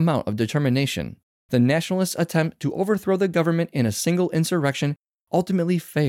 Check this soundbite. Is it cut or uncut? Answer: uncut